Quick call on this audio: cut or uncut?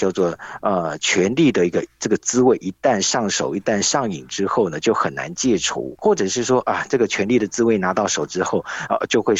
uncut